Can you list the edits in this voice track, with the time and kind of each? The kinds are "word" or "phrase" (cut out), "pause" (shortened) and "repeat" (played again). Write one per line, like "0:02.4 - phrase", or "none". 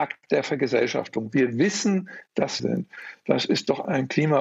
0:02.6 - phrase